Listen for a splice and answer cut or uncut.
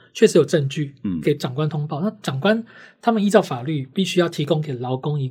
uncut